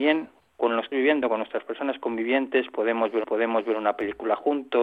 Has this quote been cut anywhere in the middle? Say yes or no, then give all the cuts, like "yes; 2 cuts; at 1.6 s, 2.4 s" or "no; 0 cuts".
yes; 2 cuts; at 0.9 s, 3.2 s